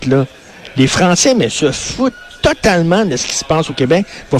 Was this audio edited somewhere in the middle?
no; 0 cuts

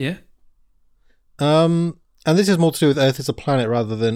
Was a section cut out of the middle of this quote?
no; 0 cuts

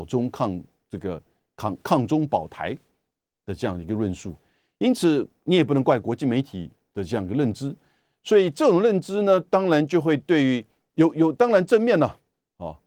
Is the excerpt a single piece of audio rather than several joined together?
yes; 0 cuts

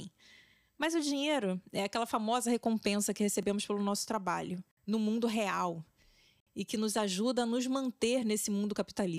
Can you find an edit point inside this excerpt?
no; 0 cuts

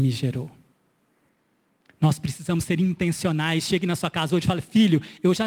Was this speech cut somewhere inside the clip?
no; 0 cuts

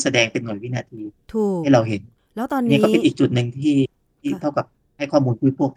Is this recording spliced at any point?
yes; 1 cut; at 2.2 s

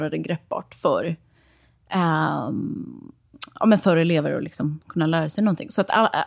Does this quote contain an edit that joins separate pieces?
no; 0 cuts

